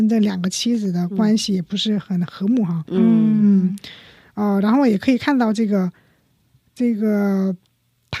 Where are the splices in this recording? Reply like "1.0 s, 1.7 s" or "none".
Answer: none

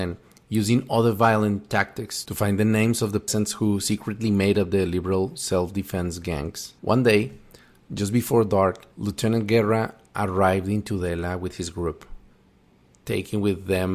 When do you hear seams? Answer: 6.8 s, 8.9 s

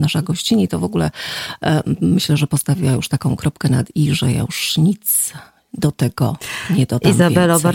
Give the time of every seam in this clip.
none

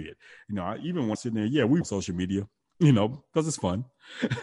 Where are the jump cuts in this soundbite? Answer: 1.1 s, 1.8 s

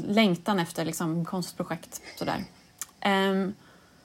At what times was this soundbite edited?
1.2 s

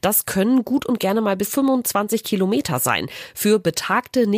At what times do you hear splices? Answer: 1.4 s

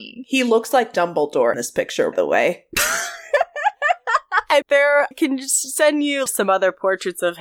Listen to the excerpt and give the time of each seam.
1.5 s, 2.1 s, 4.6 s, 5.1 s, 6.3 s

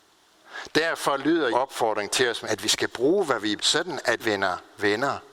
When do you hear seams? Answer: 1.5 s, 2.4 s, 3.6 s, 4.2 s

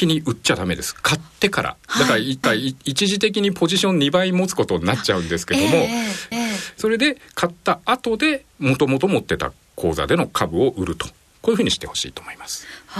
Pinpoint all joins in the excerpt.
2.4 s, 6.3 s, 8.5 s

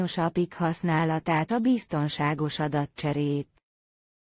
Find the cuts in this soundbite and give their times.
1.5 s

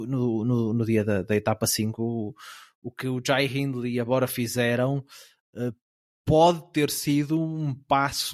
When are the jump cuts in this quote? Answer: none

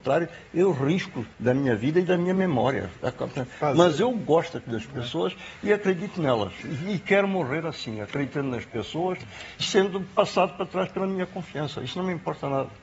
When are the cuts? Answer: 1.3 s, 9.6 s

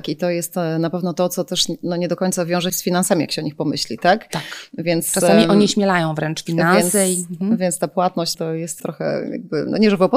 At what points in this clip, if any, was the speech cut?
2.7 s, 8.3 s, 8.8 s

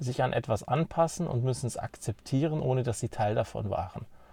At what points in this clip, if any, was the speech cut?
none

